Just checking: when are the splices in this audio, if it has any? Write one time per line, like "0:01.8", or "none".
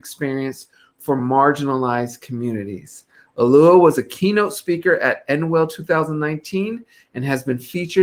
none